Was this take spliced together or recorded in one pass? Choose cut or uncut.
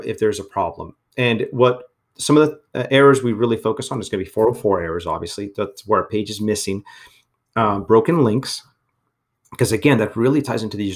uncut